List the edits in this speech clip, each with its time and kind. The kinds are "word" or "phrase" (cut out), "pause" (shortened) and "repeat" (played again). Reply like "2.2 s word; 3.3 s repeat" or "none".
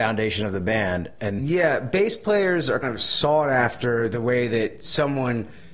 1.4 s word; 2.8 s word